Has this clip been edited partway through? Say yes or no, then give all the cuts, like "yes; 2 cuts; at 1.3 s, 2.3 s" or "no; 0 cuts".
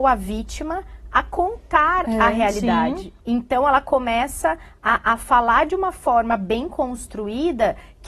yes; 1 cut; at 3.2 s